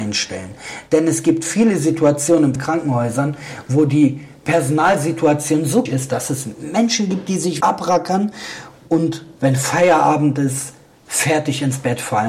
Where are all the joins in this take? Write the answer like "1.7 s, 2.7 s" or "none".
2.6 s, 5.9 s, 7.6 s, 9.4 s

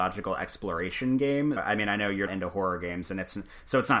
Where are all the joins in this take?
1.6 s, 2.3 s

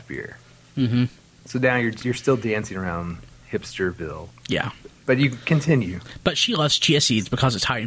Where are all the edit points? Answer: none

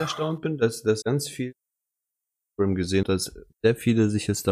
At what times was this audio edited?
1.0 s, 3.0 s

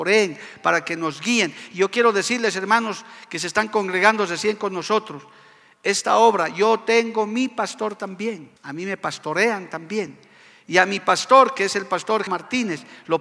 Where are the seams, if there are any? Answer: 8.6 s, 12.3 s

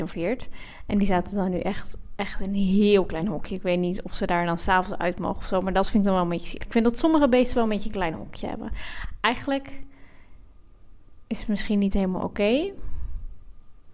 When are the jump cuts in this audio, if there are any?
none

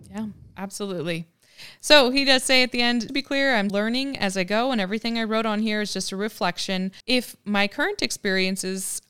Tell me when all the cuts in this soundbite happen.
3.1 s, 3.7 s, 7.0 s

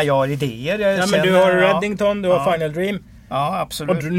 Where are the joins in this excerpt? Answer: none

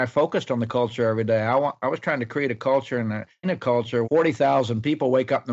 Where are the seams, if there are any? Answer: 3.4 s, 4.0 s

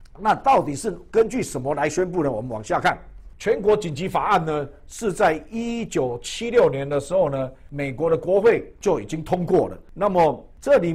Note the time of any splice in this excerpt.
none

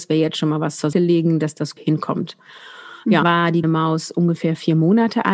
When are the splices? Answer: 0.9 s, 1.8 s, 3.2 s, 3.6 s

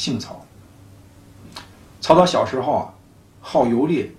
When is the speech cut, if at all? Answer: none

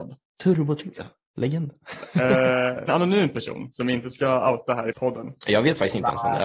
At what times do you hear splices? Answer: 0.9 s, 2.9 s, 4.9 s

